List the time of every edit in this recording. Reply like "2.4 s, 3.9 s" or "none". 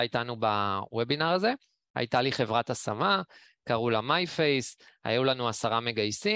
none